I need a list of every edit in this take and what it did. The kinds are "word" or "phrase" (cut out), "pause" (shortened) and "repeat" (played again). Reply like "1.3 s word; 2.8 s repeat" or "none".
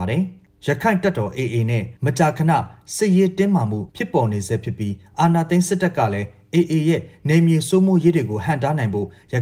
3.9 s pause